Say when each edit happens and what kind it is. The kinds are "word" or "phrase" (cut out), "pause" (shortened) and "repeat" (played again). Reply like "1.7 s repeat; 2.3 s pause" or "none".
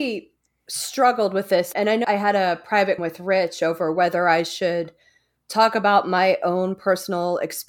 1.7 s word; 2.0 s word; 3.0 s word